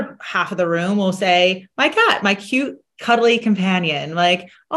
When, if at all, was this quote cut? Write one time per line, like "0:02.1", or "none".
none